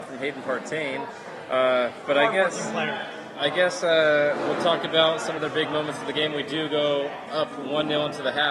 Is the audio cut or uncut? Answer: cut